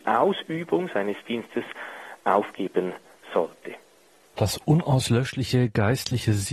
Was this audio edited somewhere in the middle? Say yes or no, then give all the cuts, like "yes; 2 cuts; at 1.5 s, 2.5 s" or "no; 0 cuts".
no; 0 cuts